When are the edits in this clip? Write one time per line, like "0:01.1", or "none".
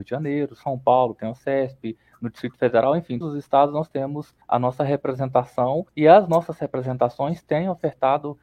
0:03.2
0:04.4
0:05.9